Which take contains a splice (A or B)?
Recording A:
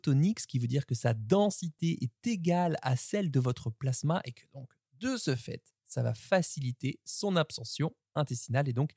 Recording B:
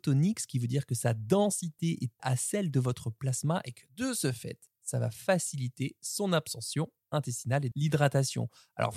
B